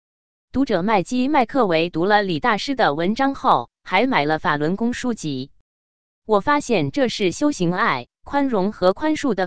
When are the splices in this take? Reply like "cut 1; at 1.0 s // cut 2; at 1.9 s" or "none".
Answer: none

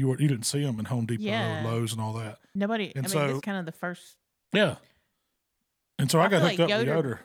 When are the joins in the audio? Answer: cut 1; at 3.4 s

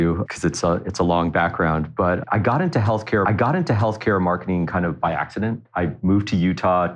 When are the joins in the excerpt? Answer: cut 1; at 3.2 s

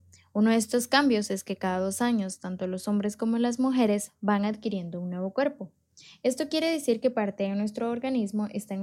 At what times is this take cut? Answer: none

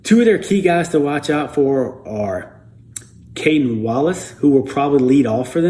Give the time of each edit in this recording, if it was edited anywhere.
none

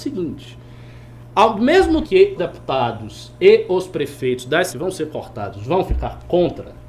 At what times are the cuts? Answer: cut 1; at 2.0 s // cut 2; at 2.4 s // cut 3; at 4.7 s

